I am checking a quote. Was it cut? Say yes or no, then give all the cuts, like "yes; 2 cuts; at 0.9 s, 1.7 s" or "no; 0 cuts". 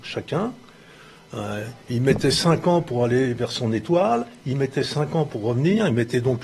no; 0 cuts